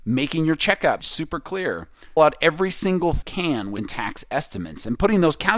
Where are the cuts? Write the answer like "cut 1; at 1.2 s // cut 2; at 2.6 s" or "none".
cut 1; at 1.0 s // cut 2; at 2.2 s // cut 3; at 3.2 s // cut 4; at 3.8 s